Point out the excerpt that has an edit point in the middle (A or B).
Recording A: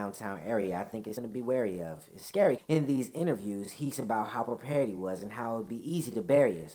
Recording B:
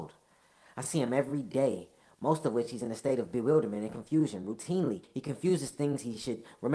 A